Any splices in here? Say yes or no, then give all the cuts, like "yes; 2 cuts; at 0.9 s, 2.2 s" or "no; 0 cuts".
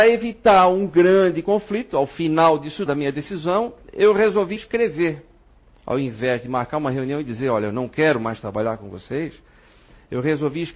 yes; 2 cuts; at 2.9 s, 4.6 s